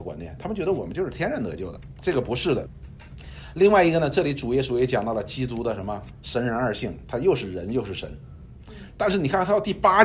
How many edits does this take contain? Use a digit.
1